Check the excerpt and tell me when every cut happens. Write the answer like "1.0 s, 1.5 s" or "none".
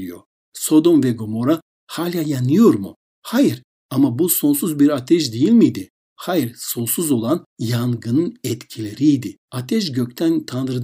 7.5 s, 9.4 s